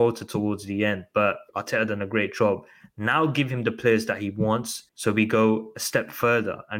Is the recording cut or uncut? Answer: cut